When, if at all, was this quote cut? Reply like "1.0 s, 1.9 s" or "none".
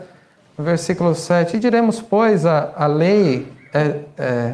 1.5 s